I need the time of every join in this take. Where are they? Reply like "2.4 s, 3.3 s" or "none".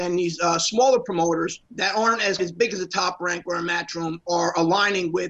1.7 s, 2.4 s